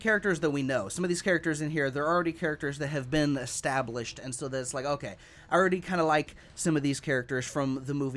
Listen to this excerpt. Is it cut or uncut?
uncut